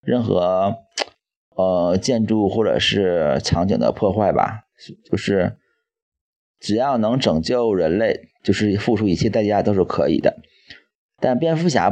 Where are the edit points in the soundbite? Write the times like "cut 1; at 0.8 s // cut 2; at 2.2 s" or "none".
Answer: none